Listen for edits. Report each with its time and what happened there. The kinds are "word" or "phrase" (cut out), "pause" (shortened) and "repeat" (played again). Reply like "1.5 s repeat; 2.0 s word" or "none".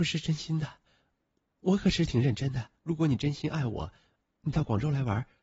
2.8 s pause